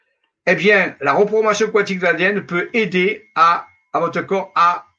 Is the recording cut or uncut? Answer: uncut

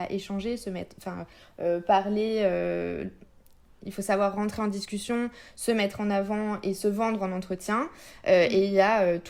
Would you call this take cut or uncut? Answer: uncut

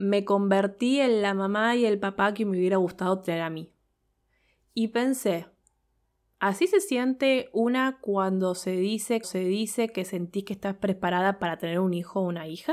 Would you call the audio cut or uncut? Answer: cut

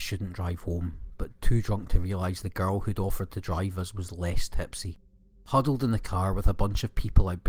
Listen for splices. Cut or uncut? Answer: uncut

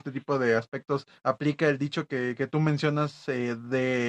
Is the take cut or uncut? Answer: cut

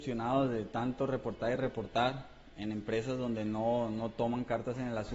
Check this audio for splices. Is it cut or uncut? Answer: uncut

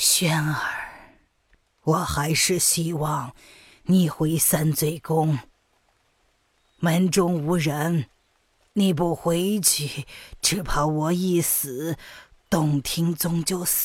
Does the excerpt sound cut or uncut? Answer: uncut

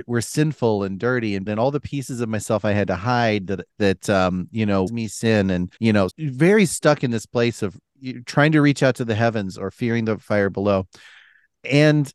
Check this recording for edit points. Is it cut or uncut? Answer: cut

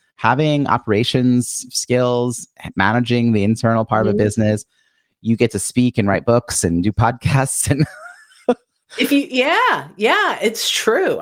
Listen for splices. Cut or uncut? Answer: uncut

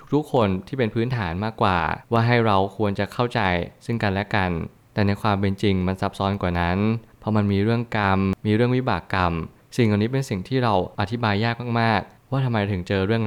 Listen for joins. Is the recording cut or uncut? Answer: cut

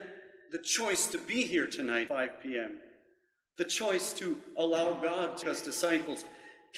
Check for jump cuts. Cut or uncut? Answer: cut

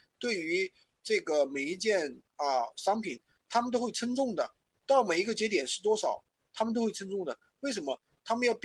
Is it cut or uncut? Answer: uncut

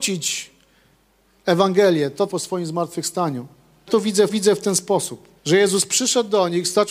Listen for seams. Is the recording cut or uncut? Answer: cut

